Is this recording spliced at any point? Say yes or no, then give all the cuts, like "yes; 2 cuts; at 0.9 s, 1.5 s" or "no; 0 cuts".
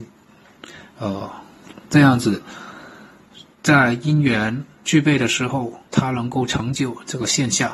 yes; 3 cuts; at 3.5 s, 4.7 s, 5.9 s